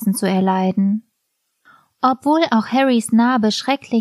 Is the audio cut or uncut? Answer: uncut